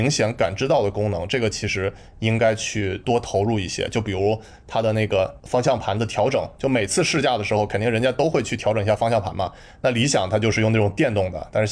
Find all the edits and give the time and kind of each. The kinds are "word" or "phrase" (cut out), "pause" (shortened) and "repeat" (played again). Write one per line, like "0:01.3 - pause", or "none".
none